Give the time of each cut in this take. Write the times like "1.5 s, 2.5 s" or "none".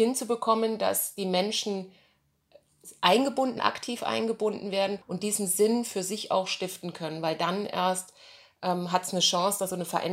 3.6 s, 5.0 s

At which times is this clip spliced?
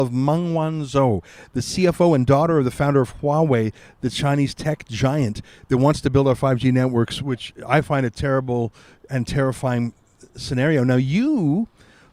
none

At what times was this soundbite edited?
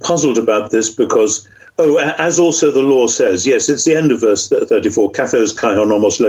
none

